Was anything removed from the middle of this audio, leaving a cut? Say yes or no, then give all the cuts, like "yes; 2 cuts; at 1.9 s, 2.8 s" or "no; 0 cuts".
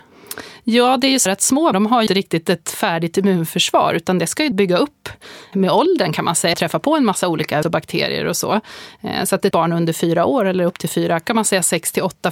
yes; 9 cuts; at 1.3 s, 1.7 s, 2.1 s, 4.5 s, 5.5 s, 6.5 s, 7.6 s, 9.5 s, 11.3 s